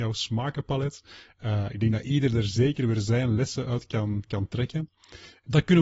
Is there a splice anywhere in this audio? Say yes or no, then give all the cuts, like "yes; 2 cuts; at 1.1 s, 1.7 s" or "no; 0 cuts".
no; 0 cuts